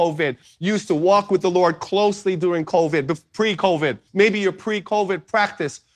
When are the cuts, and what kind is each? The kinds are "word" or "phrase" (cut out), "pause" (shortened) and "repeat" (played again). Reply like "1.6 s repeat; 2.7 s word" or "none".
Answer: 4.1 s pause